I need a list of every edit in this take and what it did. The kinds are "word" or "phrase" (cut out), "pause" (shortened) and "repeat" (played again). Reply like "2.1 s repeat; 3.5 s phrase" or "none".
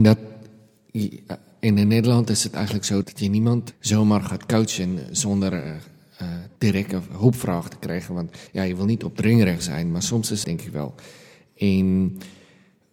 3.0 s word; 3.7 s word; 6.6 s pause; 8.5 s pause; 10.4 s phrase